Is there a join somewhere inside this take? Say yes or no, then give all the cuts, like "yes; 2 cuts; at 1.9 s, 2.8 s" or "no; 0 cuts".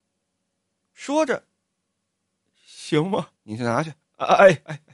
yes; 1 cut; at 3.4 s